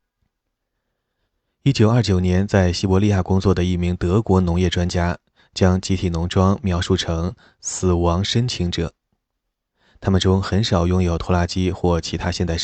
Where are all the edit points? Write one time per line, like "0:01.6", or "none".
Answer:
none